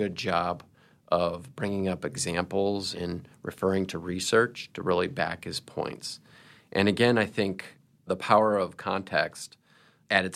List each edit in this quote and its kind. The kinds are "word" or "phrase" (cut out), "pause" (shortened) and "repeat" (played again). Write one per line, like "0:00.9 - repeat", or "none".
none